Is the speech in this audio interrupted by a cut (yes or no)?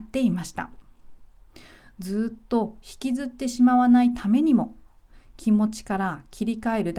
no